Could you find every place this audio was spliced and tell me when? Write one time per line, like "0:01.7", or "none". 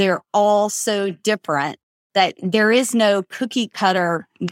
none